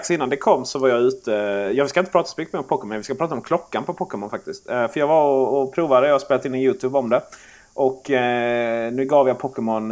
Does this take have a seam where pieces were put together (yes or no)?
no